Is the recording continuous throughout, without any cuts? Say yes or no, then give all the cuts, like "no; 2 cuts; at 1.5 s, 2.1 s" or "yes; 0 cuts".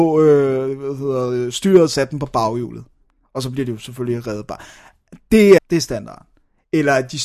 no; 2 cuts; at 1.9 s, 5.6 s